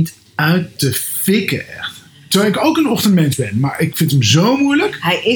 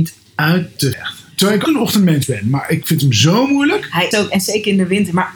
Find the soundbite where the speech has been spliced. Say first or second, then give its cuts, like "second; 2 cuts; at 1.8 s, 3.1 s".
second; 4 cuts; at 0.9 s, 1.3 s, 1.6 s, 4.1 s